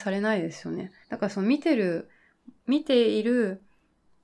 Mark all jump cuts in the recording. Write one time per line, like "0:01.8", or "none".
0:01.0
0:02.6